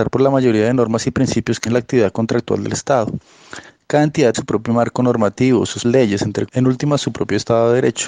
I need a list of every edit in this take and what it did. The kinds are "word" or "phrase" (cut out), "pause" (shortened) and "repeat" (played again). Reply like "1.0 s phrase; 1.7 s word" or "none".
1.7 s word; 4.3 s word; 5.8 s word; 6.5 s word